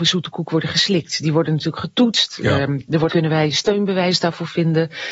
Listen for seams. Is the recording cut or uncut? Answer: cut